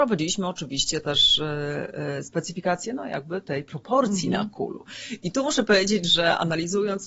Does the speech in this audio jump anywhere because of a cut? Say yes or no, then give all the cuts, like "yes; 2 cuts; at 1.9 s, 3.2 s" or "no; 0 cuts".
yes; 1 cut; at 2.8 s